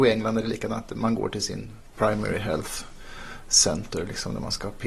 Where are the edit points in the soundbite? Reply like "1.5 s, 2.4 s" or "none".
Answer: none